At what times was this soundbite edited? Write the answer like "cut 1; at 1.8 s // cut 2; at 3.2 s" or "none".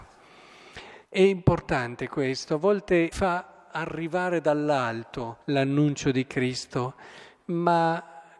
cut 1; at 1.0 s // cut 2; at 3.1 s // cut 3; at 5.4 s